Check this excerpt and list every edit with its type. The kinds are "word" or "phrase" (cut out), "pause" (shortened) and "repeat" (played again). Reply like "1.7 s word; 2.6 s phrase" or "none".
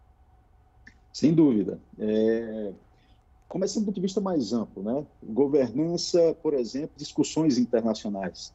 3.9 s word; 7.0 s word